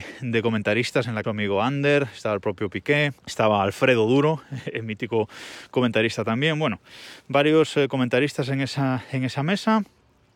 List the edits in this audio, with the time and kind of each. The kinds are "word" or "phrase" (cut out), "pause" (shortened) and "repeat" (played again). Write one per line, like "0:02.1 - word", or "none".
0:01.2 - phrase
0:03.2 - pause